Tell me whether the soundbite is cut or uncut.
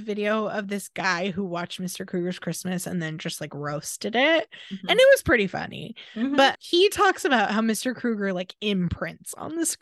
uncut